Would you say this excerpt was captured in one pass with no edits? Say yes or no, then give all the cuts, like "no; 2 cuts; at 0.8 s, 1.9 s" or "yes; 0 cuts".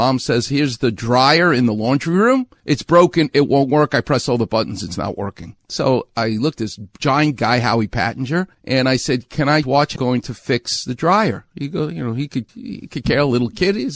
no; 4 cuts; at 6.6 s, 9.6 s, 10.0 s, 12.5 s